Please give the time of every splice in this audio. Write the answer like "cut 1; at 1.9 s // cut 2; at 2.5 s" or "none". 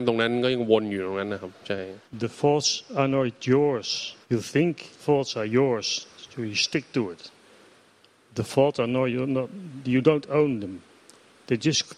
cut 1; at 2.0 s // cut 2; at 4.2 s // cut 3; at 5.0 s